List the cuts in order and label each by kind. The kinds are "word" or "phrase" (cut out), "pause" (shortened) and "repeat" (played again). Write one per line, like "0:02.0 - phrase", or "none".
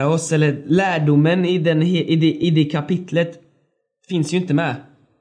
none